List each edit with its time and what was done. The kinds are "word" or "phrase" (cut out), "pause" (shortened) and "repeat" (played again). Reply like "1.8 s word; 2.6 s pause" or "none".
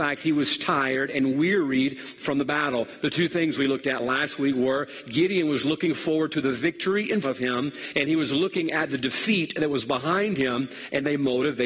7.2 s word